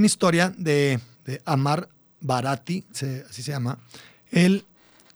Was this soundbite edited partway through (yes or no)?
yes